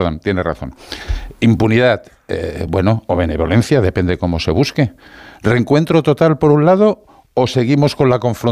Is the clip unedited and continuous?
yes; 0 cuts

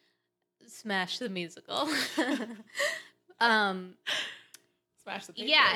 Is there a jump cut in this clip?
no; 0 cuts

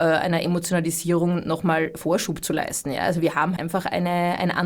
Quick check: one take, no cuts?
no; 1 cut; at 3.6 s

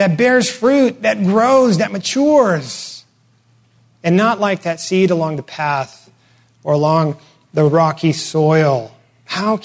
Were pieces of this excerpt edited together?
no; 0 cuts

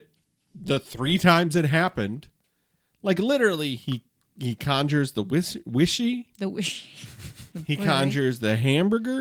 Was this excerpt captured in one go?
yes; 0 cuts

